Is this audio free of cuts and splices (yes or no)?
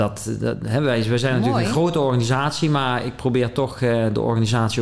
yes